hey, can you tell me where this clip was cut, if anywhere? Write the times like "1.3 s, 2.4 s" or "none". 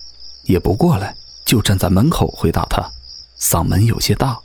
1.3 s